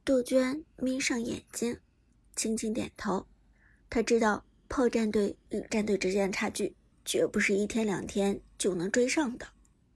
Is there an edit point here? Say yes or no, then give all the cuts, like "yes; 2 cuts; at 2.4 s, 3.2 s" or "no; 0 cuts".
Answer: yes; 1 cut; at 5.7 s